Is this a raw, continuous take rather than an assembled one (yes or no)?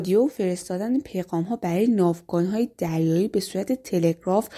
yes